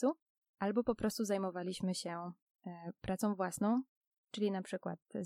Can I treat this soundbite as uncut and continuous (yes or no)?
yes